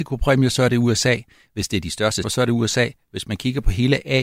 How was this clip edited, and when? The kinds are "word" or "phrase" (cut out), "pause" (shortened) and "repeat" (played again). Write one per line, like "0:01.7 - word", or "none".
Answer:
0:02.2 - word

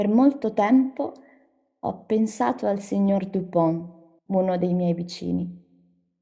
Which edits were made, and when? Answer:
0:04.2 - pause

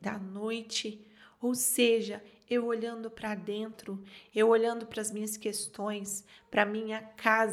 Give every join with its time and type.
none

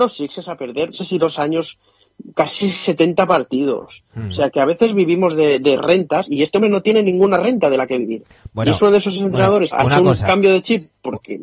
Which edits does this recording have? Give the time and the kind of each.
0:00.9 - word
0:04.5 - word
0:09.7 - word

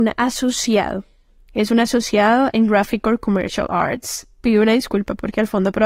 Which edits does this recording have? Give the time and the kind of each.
none

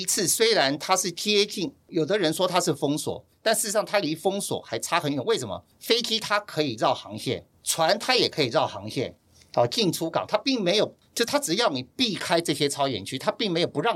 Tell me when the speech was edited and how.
none

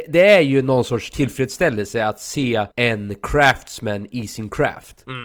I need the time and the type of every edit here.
0:02.7 - pause

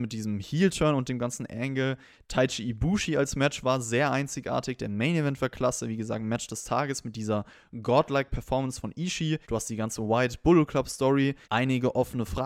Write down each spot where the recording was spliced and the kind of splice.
0:09.4 - pause
0:11.4 - pause

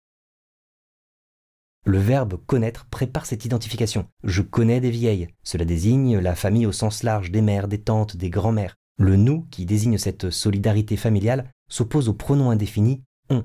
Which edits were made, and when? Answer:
0:04.1 - pause
0:05.3 - pause

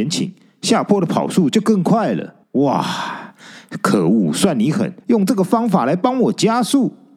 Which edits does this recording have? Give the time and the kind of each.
0:02.4 - pause
0:05.0 - pause

